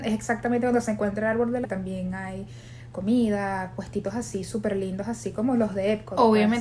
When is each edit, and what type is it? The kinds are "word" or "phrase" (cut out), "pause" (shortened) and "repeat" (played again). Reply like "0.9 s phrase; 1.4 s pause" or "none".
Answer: 1.6 s word